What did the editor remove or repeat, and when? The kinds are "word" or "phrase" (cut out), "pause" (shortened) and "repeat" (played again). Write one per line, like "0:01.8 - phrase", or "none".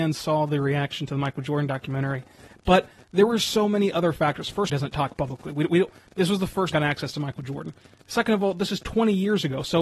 0:04.7 - phrase
0:06.7 - phrase